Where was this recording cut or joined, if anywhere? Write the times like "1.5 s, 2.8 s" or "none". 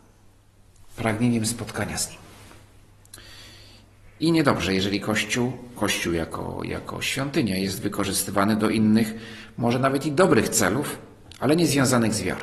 none